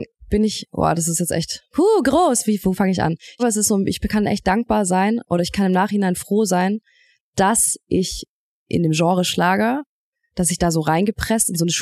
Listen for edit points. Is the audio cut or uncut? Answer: cut